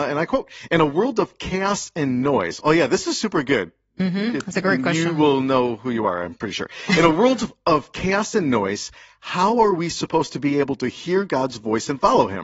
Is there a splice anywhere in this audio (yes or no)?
no